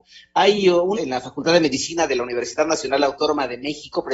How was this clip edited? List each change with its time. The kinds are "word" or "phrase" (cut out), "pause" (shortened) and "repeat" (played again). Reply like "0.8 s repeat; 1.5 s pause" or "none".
1.0 s word